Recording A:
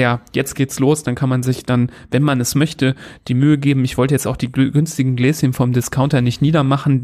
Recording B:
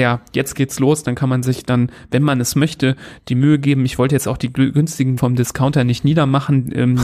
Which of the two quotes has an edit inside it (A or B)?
B